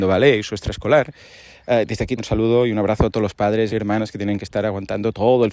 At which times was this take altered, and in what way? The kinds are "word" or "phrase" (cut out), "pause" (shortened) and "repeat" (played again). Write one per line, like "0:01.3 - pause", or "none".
0:02.2 - word
0:03.7 - word